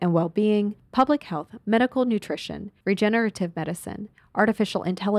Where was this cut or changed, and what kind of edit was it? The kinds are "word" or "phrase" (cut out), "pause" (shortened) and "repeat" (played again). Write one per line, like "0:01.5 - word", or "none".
none